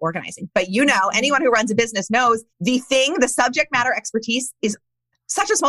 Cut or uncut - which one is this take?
cut